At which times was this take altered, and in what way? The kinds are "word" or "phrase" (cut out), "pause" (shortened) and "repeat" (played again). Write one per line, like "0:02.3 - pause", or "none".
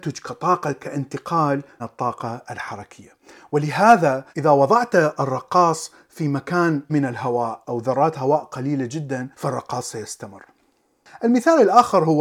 0:01.8 - word
0:04.3 - pause
0:06.9 - word
0:07.6 - word
0:09.3 - pause